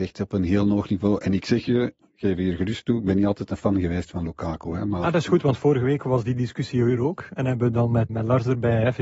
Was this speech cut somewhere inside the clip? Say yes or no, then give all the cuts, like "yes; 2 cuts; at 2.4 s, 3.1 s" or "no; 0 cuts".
yes; 1 cut; at 8.1 s